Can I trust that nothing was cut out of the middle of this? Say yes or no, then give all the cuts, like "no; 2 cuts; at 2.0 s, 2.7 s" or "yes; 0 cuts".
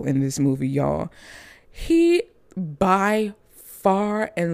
yes; 0 cuts